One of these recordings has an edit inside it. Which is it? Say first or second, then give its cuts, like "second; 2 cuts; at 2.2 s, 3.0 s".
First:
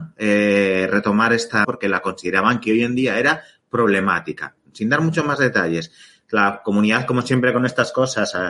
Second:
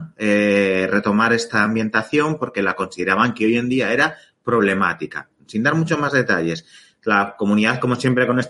first; 1 cut; at 1.6 s